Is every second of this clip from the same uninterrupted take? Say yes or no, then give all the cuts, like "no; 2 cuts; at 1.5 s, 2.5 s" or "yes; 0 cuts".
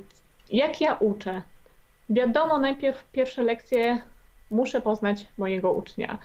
yes; 0 cuts